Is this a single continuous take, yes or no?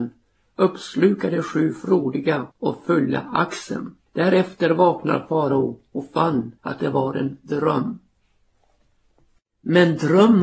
no